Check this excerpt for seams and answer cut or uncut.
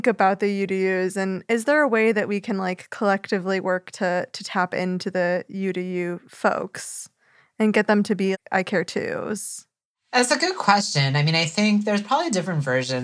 uncut